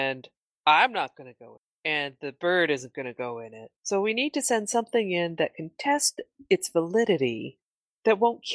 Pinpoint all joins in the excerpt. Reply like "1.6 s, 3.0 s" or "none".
3.8 s